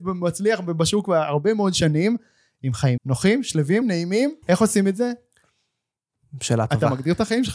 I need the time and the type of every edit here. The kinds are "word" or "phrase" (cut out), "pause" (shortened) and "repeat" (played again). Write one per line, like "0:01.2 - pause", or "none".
0:03.0 - word
0:03.8 - word
0:04.4 - pause